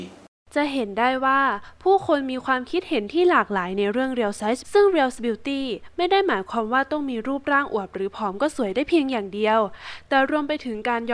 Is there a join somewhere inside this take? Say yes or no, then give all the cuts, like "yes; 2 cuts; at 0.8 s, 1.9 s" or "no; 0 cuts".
yes; 2 cuts; at 4.6 s, 5.2 s